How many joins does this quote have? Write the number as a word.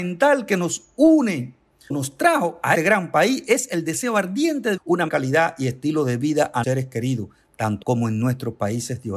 six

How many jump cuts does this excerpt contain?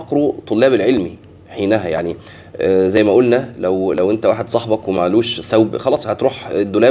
zero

